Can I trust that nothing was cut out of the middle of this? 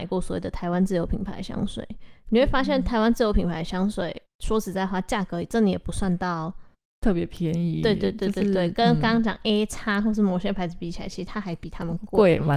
yes; 0 cuts

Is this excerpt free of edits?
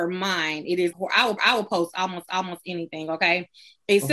no; 3 cuts; at 0.9 s, 1.4 s, 2.3 s

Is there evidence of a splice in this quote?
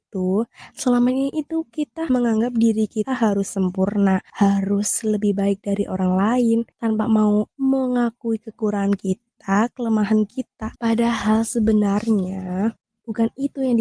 yes; 1 cut; at 10.8 s

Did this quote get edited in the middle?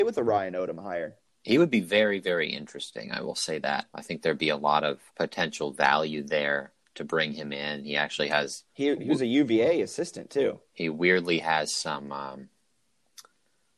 yes; 4 cuts; at 1.3 s, 3.9 s, 5.1 s, 8.7 s

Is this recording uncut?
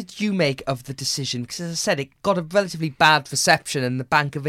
yes; 0 cuts

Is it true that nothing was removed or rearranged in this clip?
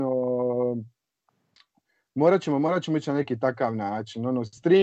yes; 0 cuts

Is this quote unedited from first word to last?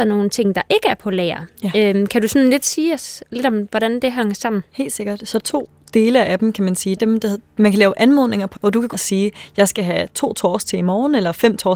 no; 4 cuts; at 5.4 s, 7.0 s, 8.6 s, 8.9 s

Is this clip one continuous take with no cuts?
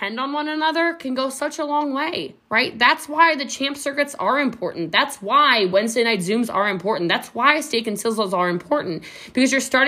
no; 1 cut; at 2.4 s

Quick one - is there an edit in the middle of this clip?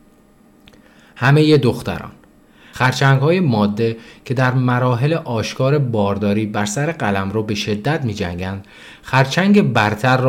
no; 0 cuts

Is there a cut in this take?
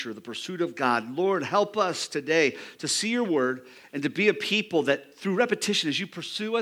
no; 0 cuts

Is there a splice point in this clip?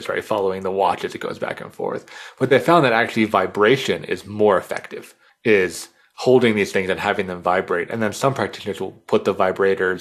yes; 1 cut; at 5.3 s

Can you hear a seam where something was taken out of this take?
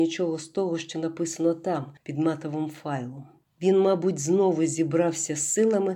yes; 1 cut; at 3.4 s

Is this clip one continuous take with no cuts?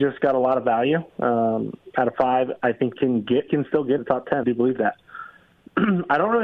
no; 5 cuts; at 1.1 s, 3.0 s, 3.5 s, 4.0 s, 4.4 s

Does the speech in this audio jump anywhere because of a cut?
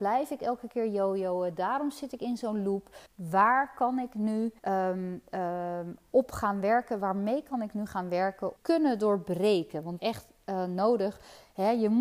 yes; 4 cuts; at 3.1 s, 4.6 s, 8.6 s, 10.0 s

